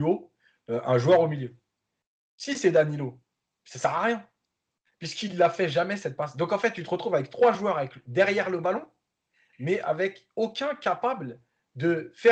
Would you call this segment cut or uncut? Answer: uncut